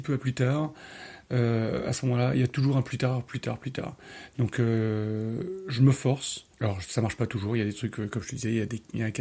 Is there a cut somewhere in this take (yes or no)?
yes